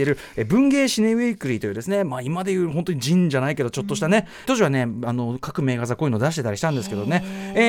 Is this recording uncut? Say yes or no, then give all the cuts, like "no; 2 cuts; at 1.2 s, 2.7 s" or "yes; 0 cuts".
no; 1 cut; at 4.4 s